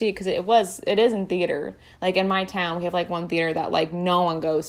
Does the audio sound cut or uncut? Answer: uncut